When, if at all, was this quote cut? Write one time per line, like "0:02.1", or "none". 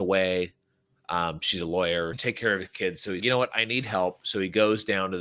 0:02.1
0:03.2